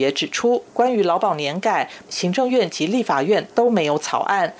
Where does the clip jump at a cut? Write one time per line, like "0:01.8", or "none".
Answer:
0:02.0